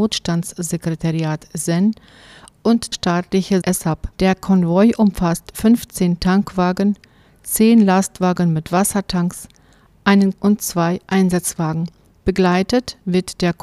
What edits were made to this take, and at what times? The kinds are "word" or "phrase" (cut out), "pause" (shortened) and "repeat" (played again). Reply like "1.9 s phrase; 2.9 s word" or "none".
2.9 s word; 3.6 s word; 4.1 s pause; 10.3 s word